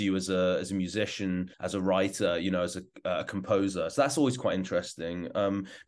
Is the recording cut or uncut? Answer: cut